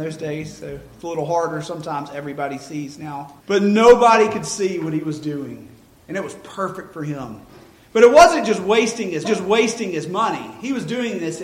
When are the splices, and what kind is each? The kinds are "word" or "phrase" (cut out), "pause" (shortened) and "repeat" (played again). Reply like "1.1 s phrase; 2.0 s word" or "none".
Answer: 3.4 s pause; 9.2 s repeat